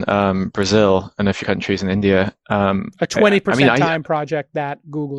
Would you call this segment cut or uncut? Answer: cut